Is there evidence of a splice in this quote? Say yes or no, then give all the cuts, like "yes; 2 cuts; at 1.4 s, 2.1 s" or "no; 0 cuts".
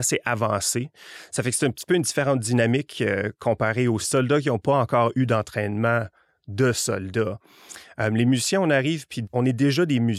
no; 0 cuts